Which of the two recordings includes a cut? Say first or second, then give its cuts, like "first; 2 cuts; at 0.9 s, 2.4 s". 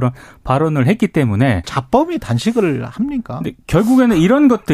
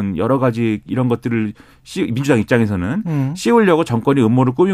first; 1 cut; at 1.6 s